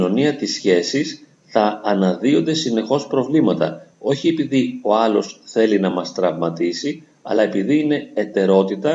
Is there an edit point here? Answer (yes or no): no